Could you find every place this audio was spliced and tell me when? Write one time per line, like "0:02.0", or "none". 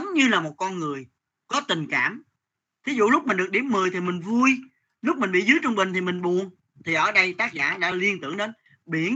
none